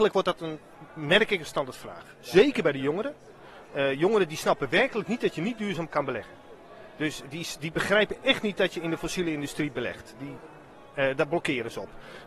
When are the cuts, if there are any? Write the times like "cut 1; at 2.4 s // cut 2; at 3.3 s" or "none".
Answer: none